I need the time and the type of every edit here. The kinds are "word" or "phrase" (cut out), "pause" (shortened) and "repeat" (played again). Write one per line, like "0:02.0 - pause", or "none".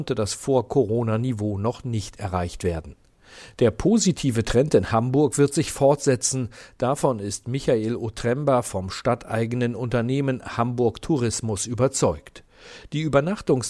none